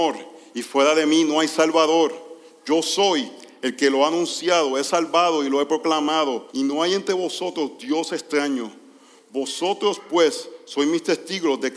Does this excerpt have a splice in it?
yes; 1 cut; at 6.5 s

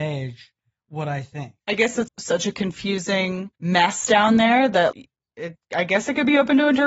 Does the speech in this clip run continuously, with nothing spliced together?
no; 4 cuts; at 1.6 s, 2.1 s, 3.6 s, 4.9 s

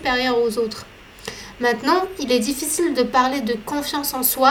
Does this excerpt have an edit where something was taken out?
no; 0 cuts

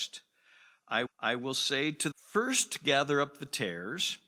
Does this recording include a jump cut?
yes; 2 cuts; at 1.1 s, 2.1 s

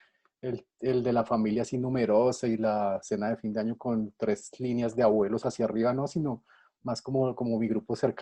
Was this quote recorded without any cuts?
yes; 0 cuts

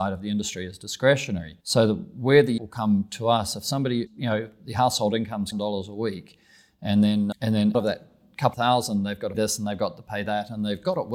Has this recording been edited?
yes; 8 cuts; at 1.6 s, 2.6 s, 4.1 s, 5.5 s, 7.3 s, 7.7 s, 8.5 s, 9.3 s

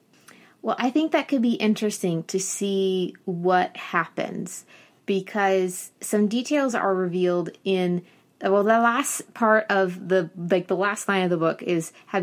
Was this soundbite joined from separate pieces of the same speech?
no; 0 cuts

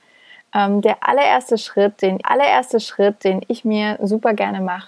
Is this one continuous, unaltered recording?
no; 1 cut; at 2.2 s

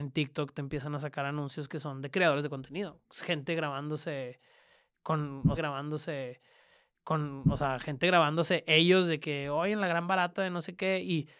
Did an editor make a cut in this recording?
yes; 1 cut; at 5.6 s

